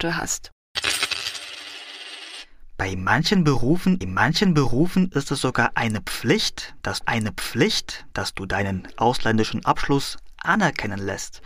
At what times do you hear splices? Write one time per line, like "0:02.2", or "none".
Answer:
0:04.0
0:07.0